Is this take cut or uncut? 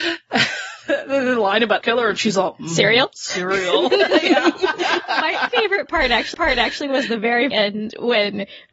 cut